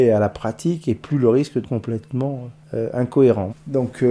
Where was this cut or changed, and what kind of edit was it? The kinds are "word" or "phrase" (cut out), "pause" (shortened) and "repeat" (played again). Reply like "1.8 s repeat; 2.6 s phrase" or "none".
1.6 s word; 2.6 s pause